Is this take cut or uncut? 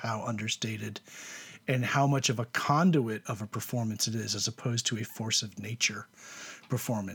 uncut